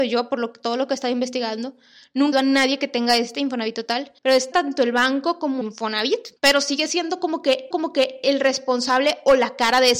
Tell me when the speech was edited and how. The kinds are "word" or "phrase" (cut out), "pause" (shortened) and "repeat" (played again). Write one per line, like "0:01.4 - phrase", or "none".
0:02.3 - phrase
0:04.2 - pause
0:04.5 - phrase
0:05.6 - word
0:06.4 - pause
0:07.7 - repeat